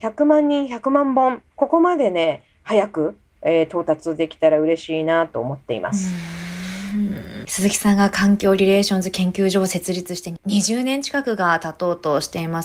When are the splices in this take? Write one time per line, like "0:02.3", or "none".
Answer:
0:01.5

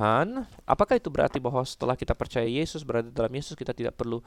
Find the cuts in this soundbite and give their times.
none

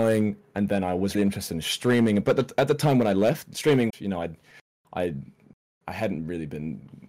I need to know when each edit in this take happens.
0:01.1
0:03.9

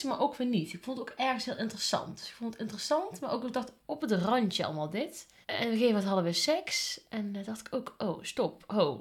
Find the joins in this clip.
0:05.4

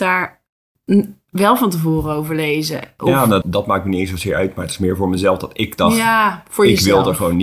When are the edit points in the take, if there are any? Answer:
0:03.4

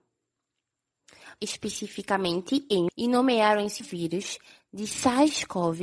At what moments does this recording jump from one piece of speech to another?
0:01.4
0:02.9
0:03.8

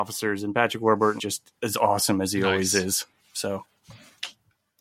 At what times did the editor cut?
0:01.2
0:01.6

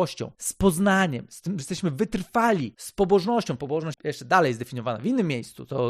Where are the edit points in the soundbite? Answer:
0:01.6
0:03.9

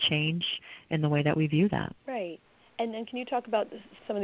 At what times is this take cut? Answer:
0:02.0

